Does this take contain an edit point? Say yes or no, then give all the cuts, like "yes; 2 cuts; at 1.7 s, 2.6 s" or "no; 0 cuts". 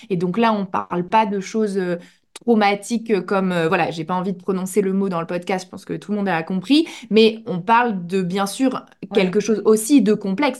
no; 0 cuts